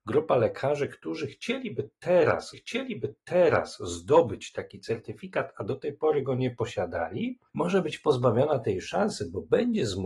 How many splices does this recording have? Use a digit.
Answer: 1